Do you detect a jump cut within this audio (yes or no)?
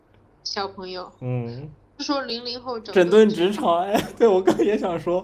no